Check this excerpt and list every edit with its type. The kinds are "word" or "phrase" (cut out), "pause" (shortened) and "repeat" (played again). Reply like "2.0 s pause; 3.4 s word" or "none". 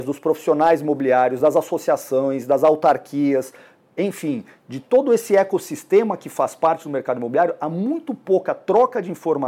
none